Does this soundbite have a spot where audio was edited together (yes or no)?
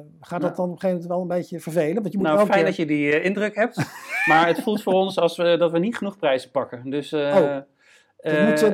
no